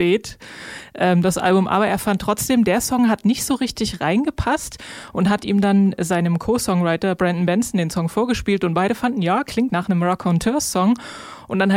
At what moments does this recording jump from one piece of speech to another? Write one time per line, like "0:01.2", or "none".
0:09.7